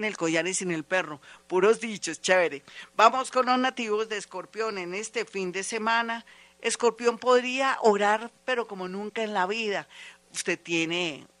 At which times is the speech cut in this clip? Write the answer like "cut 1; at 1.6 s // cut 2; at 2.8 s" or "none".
none